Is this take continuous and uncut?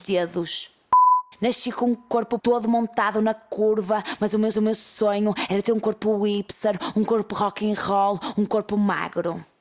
no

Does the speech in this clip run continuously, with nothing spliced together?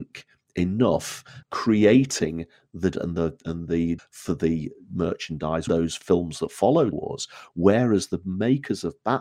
no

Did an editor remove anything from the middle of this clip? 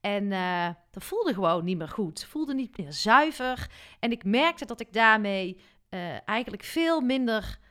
no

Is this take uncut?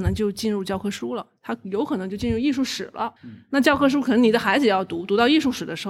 no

